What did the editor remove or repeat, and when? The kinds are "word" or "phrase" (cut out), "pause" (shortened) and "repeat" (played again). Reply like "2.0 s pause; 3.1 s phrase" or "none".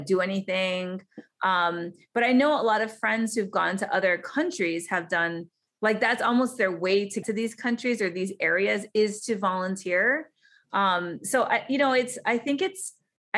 7.2 s word